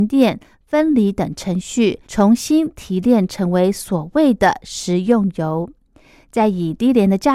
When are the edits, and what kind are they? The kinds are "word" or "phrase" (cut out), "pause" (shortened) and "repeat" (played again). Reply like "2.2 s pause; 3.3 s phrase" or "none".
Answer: 2.0 s pause